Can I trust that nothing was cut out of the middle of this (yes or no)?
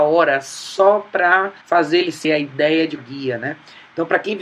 no